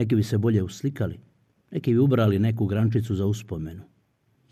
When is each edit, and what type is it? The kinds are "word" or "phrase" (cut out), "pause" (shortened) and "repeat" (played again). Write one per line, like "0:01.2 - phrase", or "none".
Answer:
none